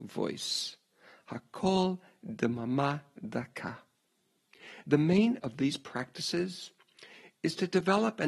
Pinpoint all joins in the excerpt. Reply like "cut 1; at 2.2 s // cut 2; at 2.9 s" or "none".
cut 1; at 5.4 s